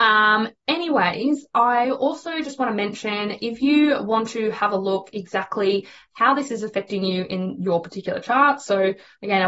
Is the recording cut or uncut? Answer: uncut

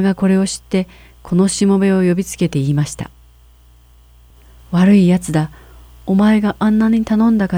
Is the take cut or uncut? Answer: uncut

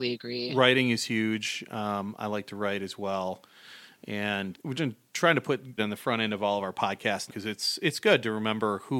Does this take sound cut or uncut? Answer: cut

